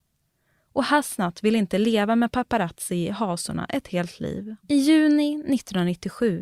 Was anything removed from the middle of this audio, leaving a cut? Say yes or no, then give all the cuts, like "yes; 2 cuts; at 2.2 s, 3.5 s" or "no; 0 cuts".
yes; 1 cut; at 4.6 s